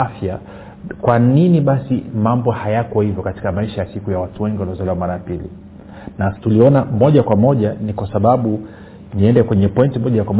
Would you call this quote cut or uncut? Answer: cut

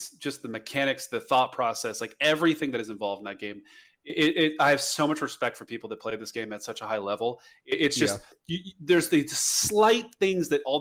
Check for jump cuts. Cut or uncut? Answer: uncut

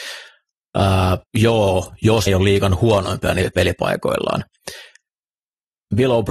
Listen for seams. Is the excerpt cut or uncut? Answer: cut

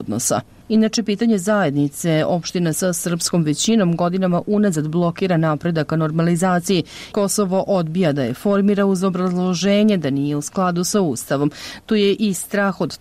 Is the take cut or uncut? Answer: cut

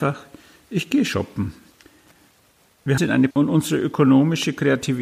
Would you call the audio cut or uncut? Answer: cut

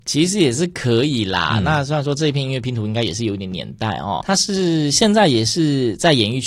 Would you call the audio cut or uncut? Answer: cut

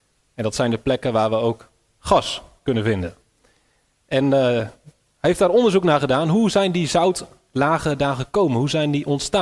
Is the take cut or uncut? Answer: uncut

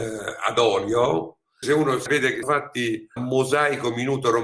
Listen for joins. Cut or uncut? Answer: cut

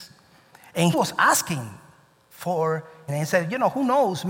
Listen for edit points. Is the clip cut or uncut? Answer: cut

